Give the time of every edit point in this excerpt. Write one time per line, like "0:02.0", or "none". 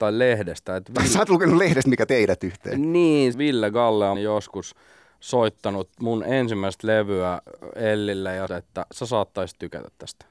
0:02.1
0:03.3
0:04.2
0:05.9
0:08.5